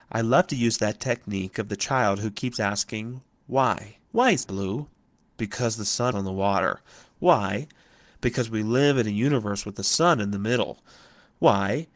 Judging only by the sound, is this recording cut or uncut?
cut